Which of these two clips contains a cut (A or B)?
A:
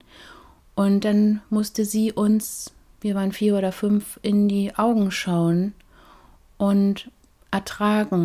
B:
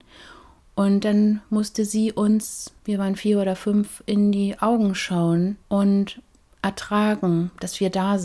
B